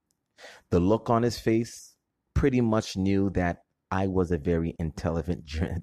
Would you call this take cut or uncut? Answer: uncut